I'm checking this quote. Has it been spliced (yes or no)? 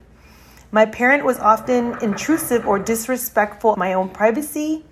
yes